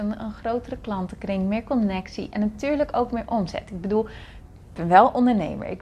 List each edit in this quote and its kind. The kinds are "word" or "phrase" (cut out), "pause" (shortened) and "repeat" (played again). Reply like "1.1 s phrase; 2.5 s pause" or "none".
none

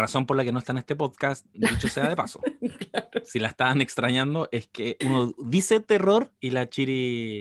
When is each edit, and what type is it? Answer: 5.0 s word; 6.4 s pause

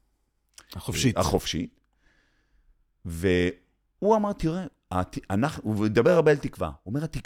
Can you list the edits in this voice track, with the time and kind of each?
none

